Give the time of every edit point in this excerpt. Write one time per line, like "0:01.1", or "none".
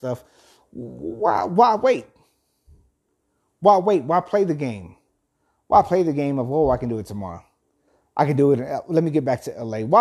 none